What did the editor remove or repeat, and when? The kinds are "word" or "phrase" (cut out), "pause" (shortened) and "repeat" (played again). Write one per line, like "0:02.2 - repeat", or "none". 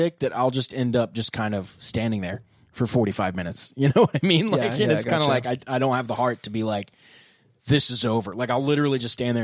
none